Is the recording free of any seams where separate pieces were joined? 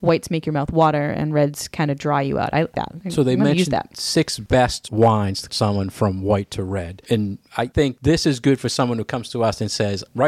no; 2 cuts; at 2.7 s, 5.5 s

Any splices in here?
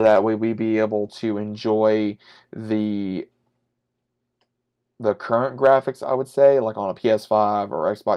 no; 0 cuts

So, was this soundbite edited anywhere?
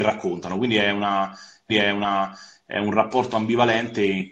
yes; 1 cut; at 1.7 s

